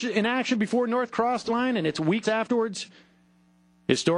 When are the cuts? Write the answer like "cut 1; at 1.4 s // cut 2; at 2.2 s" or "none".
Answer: cut 1; at 1.1 s // cut 2; at 1.5 s // cut 3; at 2.2 s